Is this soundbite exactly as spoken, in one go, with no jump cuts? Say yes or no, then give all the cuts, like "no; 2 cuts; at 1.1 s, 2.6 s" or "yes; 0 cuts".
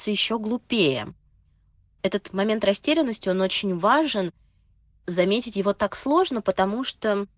yes; 0 cuts